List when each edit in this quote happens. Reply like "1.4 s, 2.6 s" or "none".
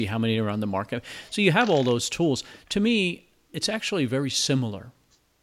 none